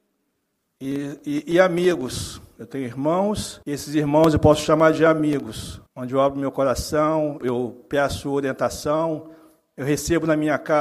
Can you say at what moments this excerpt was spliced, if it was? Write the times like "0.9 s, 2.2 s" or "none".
3.6 s, 5.9 s, 7.4 s